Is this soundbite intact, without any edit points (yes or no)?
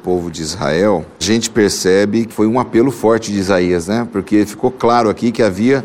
no